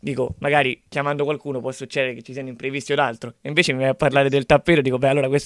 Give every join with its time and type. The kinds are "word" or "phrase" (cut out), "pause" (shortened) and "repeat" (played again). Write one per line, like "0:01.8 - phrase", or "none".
none